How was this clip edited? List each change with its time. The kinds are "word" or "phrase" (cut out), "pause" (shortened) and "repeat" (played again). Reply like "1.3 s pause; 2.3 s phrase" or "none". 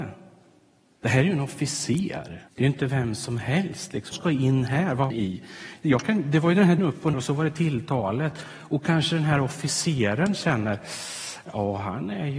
2.5 s pause; 4.1 s word; 5.1 s phrase; 6.8 s word; 7.1 s word